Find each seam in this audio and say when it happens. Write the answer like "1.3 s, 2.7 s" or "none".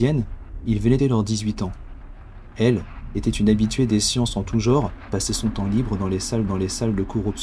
1.0 s, 5.1 s, 6.5 s